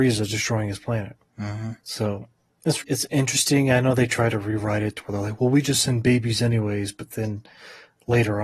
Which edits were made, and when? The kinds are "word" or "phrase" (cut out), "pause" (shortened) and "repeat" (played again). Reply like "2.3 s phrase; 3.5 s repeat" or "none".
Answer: 1.8 s pause; 2.8 s word

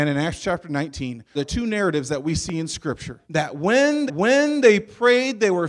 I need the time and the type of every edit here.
1.4 s word; 3.2 s pause; 4.1 s repeat

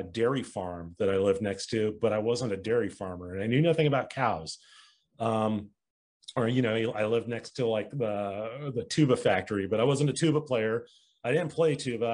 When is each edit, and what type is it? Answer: none

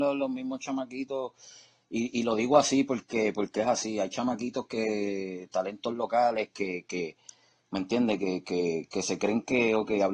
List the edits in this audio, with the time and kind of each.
none

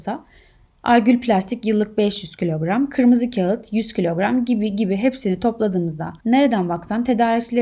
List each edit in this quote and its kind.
6.2 s pause

